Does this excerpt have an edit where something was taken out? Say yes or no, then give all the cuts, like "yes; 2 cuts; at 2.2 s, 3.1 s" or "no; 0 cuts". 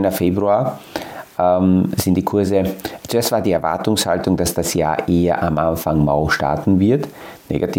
no; 0 cuts